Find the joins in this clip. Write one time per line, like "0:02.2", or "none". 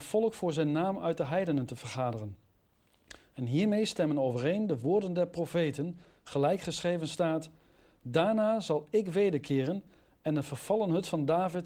none

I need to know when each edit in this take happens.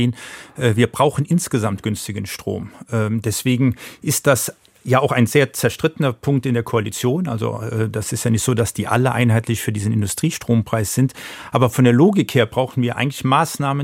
none

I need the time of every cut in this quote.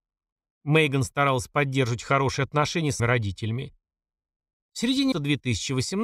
0:03.0
0:05.1

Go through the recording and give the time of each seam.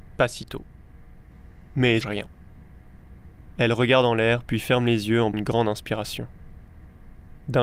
0:02.0
0:05.3

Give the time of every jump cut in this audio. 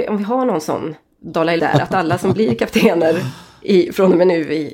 0:01.6

